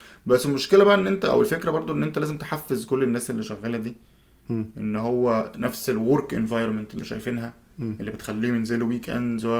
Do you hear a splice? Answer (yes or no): no